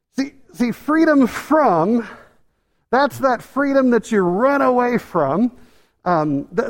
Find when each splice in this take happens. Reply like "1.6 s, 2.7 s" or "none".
none